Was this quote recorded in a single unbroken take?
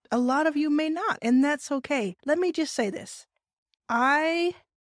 no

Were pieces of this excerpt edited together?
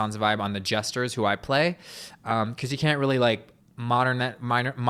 yes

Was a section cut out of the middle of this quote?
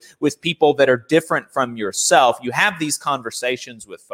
no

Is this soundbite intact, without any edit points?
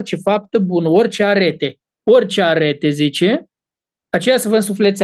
yes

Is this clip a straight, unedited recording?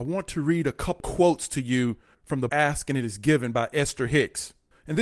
no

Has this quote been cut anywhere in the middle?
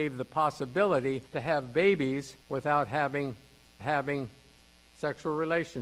yes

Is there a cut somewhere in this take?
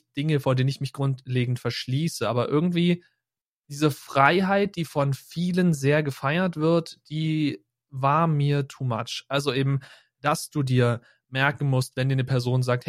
no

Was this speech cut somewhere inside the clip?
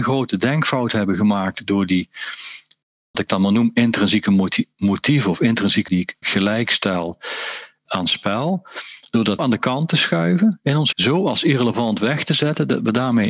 yes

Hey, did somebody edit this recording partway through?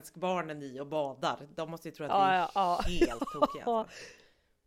no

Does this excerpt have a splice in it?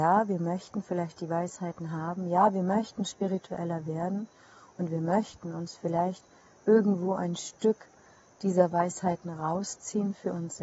no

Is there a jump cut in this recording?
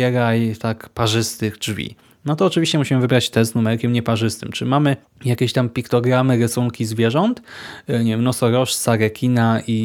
yes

